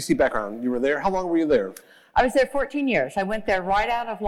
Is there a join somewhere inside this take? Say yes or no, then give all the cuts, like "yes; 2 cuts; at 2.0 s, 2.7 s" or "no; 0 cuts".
no; 0 cuts